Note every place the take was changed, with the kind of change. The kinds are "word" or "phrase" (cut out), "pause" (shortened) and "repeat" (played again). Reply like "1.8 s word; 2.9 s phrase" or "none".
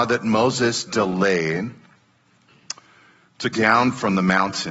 3.5 s word